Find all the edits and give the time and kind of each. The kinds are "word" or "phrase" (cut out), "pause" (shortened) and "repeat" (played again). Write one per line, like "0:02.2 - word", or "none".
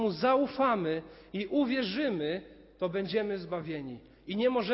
none

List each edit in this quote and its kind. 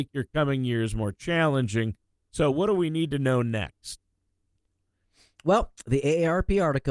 none

